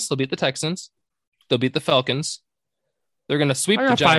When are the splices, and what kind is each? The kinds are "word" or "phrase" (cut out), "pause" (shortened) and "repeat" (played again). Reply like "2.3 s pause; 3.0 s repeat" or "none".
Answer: none